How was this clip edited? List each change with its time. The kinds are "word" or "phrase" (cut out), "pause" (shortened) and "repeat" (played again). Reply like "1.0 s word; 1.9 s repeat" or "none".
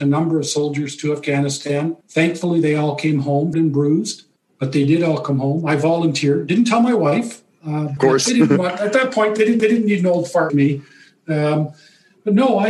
2.0 s pause; 3.5 s phrase; 4.4 s pause; 8.0 s word; 9.6 s repeat; 10.5 s word